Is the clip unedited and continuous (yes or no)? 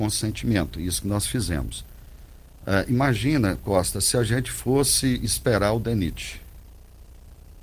yes